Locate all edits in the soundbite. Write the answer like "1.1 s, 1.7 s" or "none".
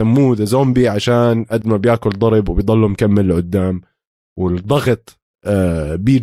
none